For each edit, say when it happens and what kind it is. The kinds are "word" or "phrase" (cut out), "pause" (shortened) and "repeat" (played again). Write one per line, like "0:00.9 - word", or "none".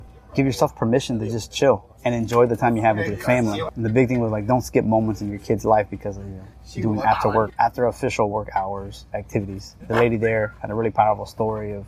none

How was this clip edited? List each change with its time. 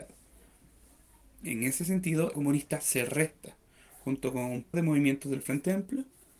0:02.3 - phrase
0:04.7 - word

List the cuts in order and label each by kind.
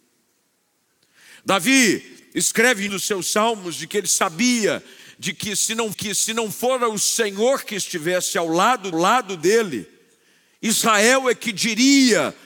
0:02.9 - word
0:05.9 - repeat
0:08.9 - repeat

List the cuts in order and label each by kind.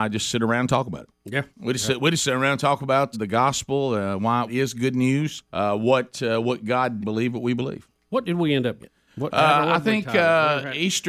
0:01.5 - pause
0:03.1 - word
0:04.5 - word
0:05.5 - pause
0:07.0 - phrase
0:08.8 - word

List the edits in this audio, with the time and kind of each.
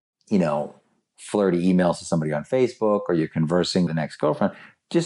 0:03.9 - word

